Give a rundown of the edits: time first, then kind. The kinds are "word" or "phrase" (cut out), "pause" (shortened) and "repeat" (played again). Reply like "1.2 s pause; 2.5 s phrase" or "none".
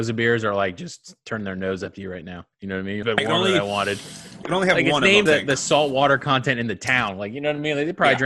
2.5 s pause; 3.0 s phrase; 4.4 s word; 5.3 s word